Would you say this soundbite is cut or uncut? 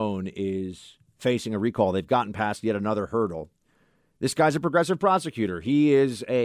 uncut